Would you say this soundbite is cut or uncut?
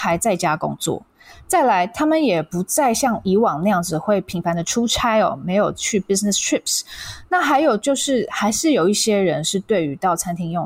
uncut